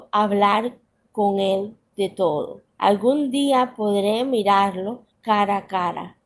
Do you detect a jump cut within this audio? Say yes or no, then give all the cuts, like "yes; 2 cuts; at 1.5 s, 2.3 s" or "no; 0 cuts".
yes; 2 cuts; at 2.7 s, 5.1 s